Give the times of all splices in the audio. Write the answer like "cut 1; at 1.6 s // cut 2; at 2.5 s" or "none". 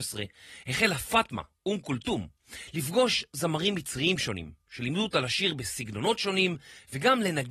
none